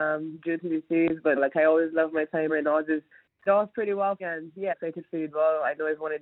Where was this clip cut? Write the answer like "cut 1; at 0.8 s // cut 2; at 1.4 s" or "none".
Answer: cut 1; at 1.4 s // cut 2; at 2.5 s // cut 3; at 3.5 s // cut 4; at 4.2 s // cut 5; at 4.7 s // cut 6; at 5.3 s